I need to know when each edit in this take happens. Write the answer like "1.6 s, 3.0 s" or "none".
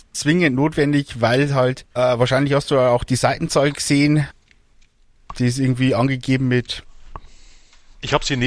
1.9 s